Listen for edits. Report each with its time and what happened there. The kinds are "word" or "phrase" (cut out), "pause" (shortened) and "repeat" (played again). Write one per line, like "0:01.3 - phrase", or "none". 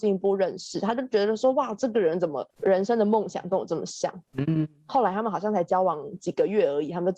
0:02.5 - pause
0:04.3 - pause